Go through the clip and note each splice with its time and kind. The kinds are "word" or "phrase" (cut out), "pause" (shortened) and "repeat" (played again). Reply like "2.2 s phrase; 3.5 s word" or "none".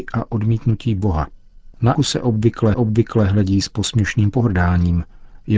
1.9 s word; 2.7 s repeat